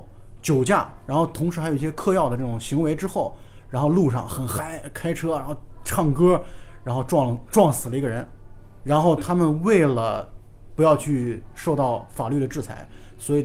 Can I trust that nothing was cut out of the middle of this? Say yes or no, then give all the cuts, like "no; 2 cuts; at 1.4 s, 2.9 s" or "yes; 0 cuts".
no; 1 cut; at 8.8 s